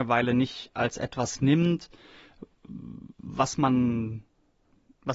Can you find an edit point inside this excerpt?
no; 0 cuts

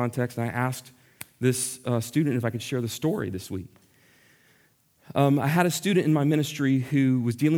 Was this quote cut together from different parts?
no; 0 cuts

